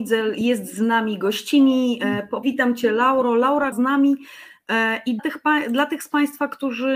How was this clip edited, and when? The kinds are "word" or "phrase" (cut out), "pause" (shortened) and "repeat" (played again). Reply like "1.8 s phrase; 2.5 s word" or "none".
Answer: 2.4 s word; 3.7 s word; 5.2 s word

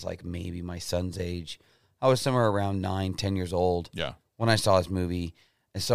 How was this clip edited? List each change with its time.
none

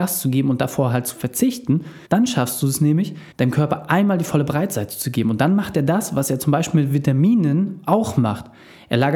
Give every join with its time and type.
2.0 s pause; 3.3 s pause

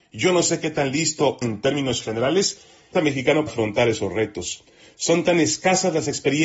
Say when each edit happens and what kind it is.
1.4 s word; 2.9 s phrase; 3.5 s word

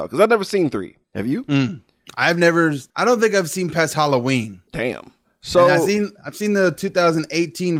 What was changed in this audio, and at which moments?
1.0 s pause; 2.9 s pause; 4.7 s pause

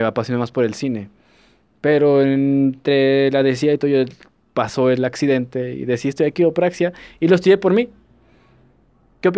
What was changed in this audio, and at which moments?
none

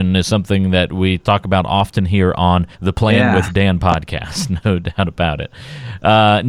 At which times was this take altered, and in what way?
2.7 s pause

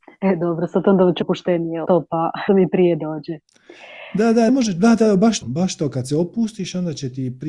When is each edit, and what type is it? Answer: 1.2 s word; 1.8 s word; 2.5 s word; 4.5 s word; 5.4 s word

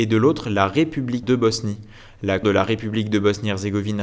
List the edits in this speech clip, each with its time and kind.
1.2 s word; 2.4 s word

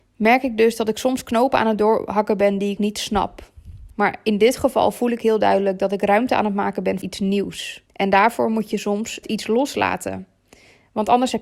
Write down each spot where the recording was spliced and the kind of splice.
2.8 s word; 7.0 s word; 7.9 s pause; 9.2 s word

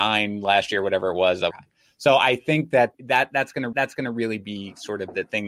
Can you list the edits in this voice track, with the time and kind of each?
1.5 s phrase; 2.9 s word; 3.7 s repeat

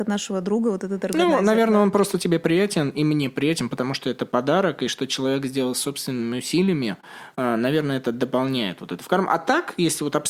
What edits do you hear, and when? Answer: none

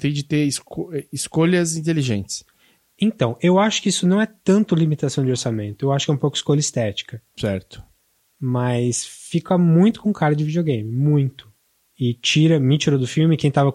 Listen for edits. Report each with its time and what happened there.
7.3 s pause

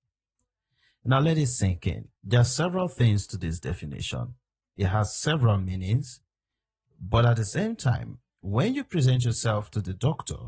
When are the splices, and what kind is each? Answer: 2.2 s pause; 8.3 s pause

